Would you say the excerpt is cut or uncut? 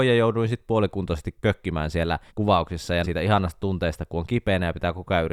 cut